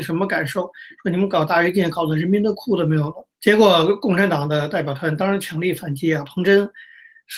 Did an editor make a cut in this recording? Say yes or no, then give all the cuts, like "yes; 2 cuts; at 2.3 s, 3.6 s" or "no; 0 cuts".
yes; 1 cut; at 3.3 s